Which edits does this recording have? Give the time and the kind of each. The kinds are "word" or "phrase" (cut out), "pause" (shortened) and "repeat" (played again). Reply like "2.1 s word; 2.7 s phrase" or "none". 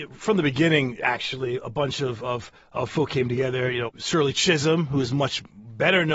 2.7 s word; 3.9 s phrase